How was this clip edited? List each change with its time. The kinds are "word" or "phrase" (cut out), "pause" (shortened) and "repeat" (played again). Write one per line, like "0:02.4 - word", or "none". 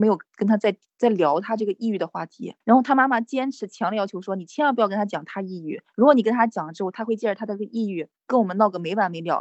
0:02.6 - pause
0:05.9 - pause
0:08.1 - pause